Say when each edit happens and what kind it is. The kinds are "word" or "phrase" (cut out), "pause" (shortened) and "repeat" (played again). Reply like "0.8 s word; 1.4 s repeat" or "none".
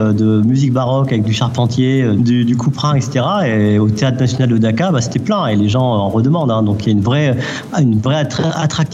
2.2 s word